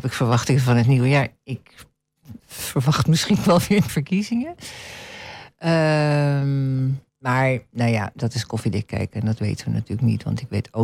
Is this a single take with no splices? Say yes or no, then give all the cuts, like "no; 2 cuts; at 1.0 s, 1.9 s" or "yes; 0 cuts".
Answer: no; 4 cuts; at 2.4 s, 3.4 s, 3.9 s, 7.1 s